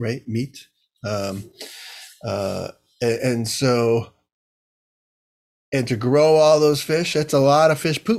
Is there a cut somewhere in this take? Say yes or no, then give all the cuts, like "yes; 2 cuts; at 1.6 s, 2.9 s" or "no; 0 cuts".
no; 0 cuts